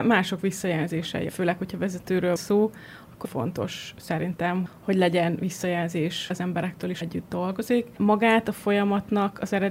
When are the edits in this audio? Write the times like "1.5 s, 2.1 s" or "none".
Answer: 1.3 s, 2.4 s, 3.2 s, 4.7 s, 6.3 s, 7.0 s, 8.0 s